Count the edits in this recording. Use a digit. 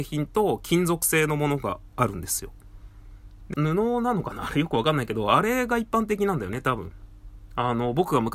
1